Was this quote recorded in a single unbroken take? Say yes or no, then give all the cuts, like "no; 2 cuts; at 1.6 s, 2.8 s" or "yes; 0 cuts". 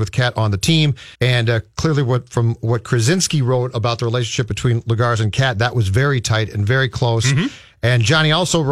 no; 1 cut; at 1.1 s